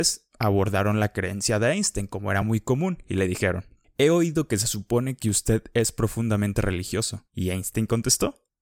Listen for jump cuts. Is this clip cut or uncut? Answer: uncut